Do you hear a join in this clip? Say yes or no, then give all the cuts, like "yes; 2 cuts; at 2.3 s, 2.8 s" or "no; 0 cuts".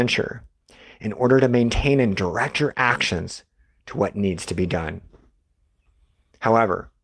no; 0 cuts